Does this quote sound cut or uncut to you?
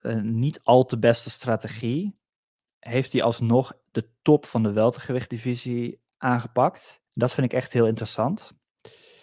cut